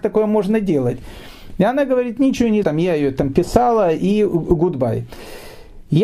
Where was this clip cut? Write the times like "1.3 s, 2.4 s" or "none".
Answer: 2.6 s